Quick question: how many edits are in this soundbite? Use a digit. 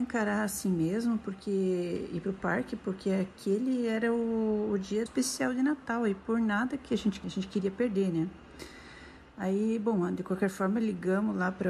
2